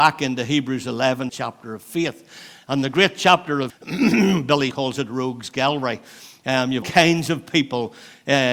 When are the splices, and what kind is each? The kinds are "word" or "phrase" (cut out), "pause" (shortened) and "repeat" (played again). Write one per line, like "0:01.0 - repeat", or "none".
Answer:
0:01.3 - phrase
0:03.7 - word
0:04.7 - word
0:06.8 - word